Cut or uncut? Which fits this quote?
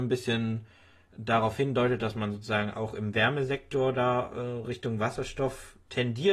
uncut